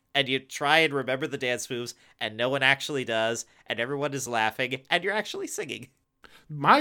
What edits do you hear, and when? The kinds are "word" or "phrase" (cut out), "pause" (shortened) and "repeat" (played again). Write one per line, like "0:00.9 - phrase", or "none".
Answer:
none